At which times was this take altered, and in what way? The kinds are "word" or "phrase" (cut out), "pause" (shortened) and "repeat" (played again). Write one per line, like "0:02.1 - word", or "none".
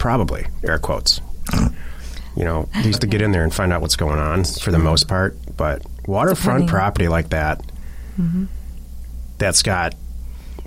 0:02.9 - word